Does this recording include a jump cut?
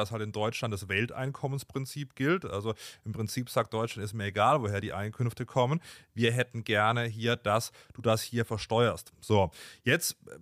no; 0 cuts

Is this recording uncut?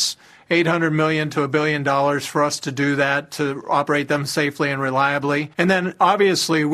no; 1 cut; at 5.5 s

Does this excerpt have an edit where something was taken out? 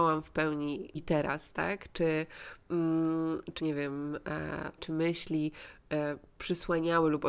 yes; 3 cuts; at 0.9 s, 3.6 s, 4.8 s

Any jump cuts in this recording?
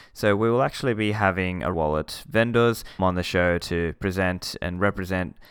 yes; 2 cuts; at 1.7 s, 3.0 s

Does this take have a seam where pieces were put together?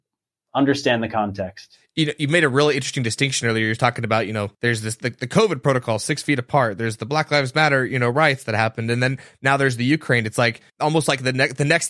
yes; 2 cuts; at 4.5 s, 10.7 s

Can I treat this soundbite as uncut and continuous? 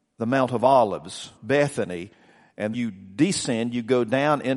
no; 2 cuts; at 1.4 s, 2.7 s

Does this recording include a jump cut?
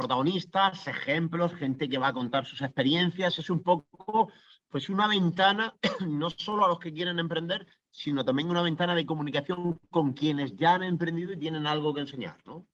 no; 0 cuts

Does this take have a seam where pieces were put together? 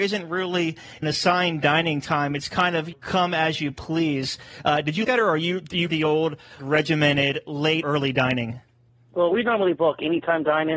yes; 6 cuts; at 1.0 s, 2.9 s, 5.0 s, 5.9 s, 6.6 s, 7.8 s

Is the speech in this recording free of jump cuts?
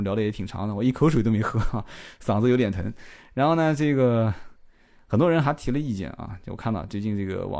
yes; 0 cuts

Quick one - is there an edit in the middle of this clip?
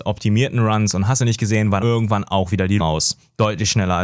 yes; 2 cuts; at 1.8 s, 2.8 s

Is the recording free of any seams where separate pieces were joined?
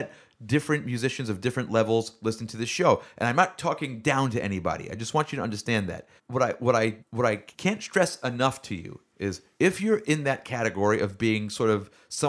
no; 3 cuts; at 6.2 s, 7.0 s, 7.5 s

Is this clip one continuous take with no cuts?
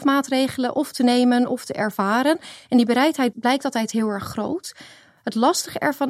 no; 1 cut; at 3.3 s

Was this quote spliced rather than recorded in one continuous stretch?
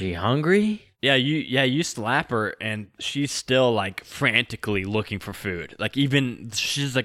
no; 0 cuts

